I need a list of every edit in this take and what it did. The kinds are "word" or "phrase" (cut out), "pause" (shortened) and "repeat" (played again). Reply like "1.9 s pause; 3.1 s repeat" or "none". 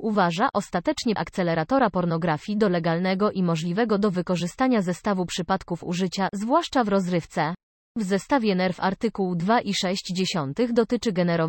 1.2 s phrase; 7.7 s pause